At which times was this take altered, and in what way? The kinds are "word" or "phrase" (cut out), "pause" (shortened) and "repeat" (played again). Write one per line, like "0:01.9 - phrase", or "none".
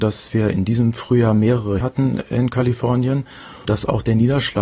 0:01.8 - word
0:03.6 - word